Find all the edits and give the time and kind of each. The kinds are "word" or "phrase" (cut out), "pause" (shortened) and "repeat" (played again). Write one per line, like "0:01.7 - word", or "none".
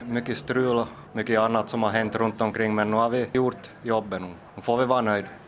none